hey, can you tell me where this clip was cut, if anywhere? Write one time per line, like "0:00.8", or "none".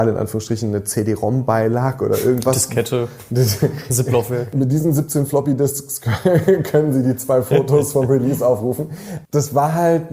none